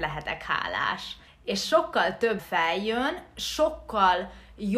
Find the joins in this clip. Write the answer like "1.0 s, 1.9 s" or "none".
1.3 s, 2.4 s